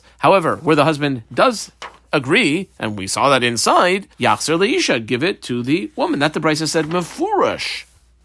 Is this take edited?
yes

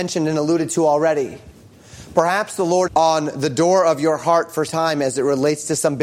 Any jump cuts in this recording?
yes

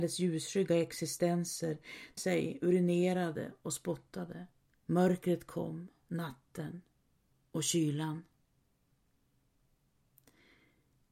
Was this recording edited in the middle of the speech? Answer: yes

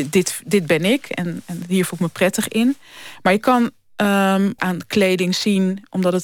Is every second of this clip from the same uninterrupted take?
no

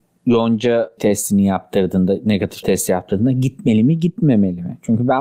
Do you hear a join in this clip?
yes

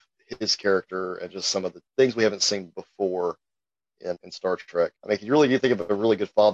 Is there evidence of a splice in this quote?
yes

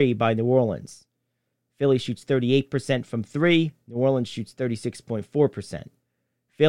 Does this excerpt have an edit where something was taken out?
no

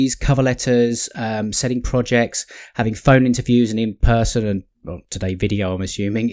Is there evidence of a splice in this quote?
no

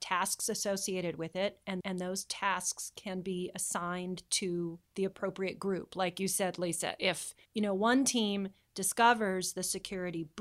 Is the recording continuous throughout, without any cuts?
no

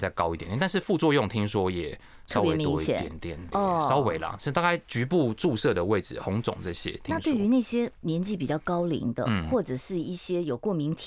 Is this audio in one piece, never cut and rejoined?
no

